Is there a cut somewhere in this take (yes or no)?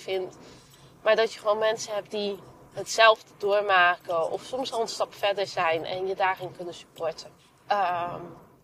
yes